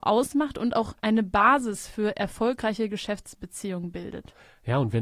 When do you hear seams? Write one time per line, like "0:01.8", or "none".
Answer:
0:01.0